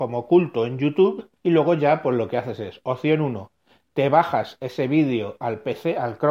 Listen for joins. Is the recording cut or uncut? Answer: cut